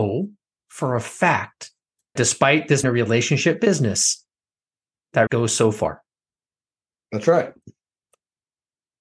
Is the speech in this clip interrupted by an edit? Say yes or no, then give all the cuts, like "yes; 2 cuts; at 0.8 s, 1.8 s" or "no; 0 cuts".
yes; 3 cuts; at 2.2 s, 2.8 s, 5.3 s